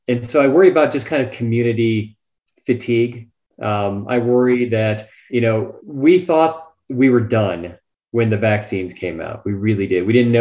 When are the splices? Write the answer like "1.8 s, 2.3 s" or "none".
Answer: none